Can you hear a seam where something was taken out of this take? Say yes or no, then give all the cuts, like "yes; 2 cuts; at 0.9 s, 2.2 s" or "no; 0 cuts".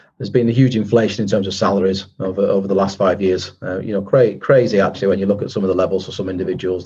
no; 0 cuts